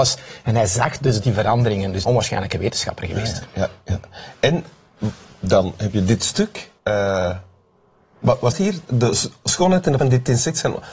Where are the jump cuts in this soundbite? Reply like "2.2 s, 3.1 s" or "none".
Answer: 2.0 s, 6.8 s, 8.5 s, 10.0 s